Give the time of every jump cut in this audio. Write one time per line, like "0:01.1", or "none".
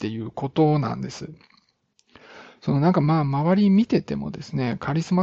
none